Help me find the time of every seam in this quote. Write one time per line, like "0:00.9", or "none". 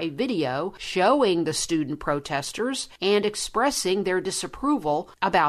none